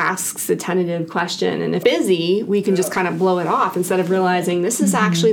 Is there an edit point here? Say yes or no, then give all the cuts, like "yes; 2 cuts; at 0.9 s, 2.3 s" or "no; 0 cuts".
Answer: yes; 1 cut; at 1.8 s